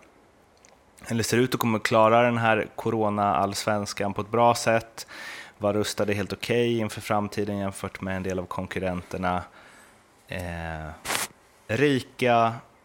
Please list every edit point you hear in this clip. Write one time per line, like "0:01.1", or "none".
none